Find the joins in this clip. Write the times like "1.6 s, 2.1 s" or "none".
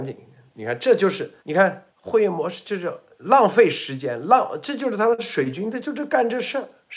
1.4 s, 1.9 s